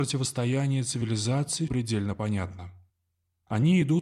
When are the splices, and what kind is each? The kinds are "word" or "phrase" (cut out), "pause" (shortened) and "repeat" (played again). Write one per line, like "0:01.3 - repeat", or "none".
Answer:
0:01.7 - word

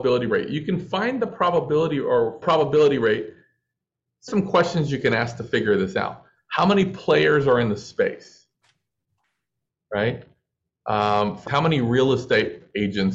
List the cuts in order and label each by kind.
0:02.4 - phrase
0:04.3 - word
0:11.5 - word

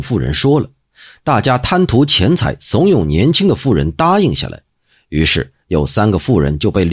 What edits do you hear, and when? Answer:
none

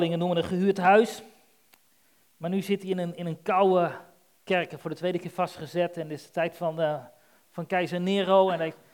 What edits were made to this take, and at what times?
none

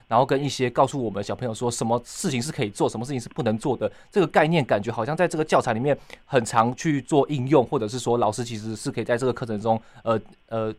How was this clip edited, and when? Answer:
none

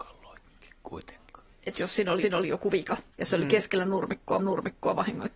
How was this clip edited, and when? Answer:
0:02.2 - repeat
0:03.1 - pause
0:04.4 - repeat

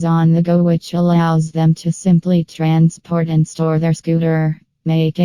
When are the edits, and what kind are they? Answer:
none

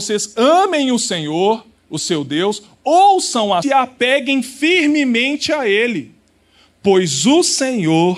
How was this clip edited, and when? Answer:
0:03.6 - phrase

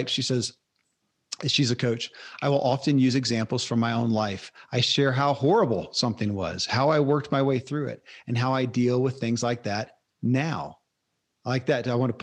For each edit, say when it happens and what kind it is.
none

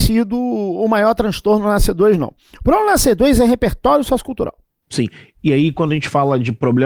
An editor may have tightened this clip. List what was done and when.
none

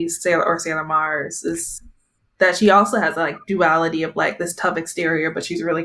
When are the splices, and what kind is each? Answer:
none

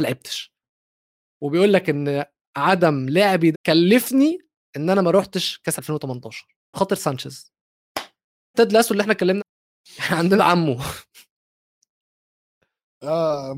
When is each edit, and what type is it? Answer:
0:03.5 - word
0:05.8 - word
0:06.7 - word
0:08.5 - word
0:09.4 - word
0:10.4 - word

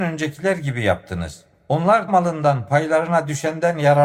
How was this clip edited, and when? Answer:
0:02.1 - word

